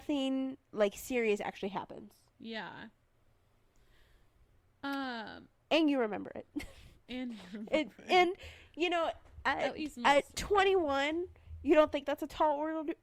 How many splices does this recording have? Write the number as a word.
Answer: zero